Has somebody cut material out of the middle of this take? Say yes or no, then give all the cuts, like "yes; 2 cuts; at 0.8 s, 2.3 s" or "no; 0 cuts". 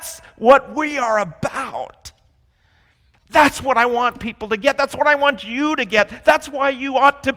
no; 0 cuts